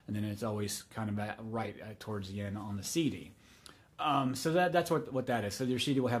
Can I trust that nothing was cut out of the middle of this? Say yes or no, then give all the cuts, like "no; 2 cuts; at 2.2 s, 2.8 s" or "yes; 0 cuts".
yes; 0 cuts